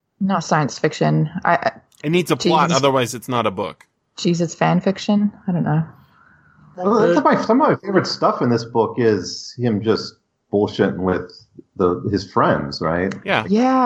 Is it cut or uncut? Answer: uncut